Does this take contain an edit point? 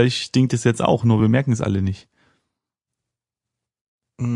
no; 0 cuts

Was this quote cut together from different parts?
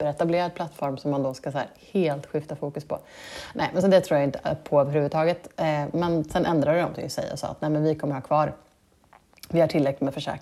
no; 0 cuts

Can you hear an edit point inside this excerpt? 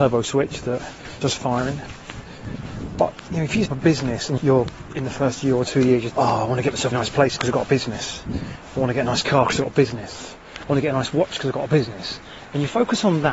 yes; 6 cuts; at 1.2 s, 3.7 s, 4.4 s, 6.1 s, 6.9 s, 7.4 s

